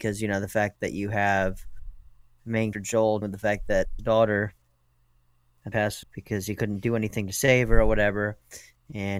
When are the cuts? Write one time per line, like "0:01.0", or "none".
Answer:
0:02.7
0:03.2
0:04.0
0:05.7
0:06.0